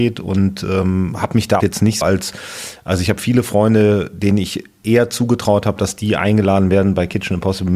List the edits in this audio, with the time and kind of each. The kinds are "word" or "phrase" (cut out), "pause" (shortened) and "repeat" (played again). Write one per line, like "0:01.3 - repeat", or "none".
0:01.6 - word
0:02.0 - word